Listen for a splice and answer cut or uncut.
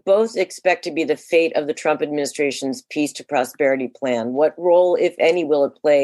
uncut